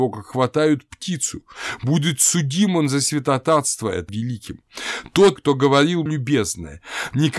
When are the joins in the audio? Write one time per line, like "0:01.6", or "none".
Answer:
0:04.1
0:05.4
0:06.1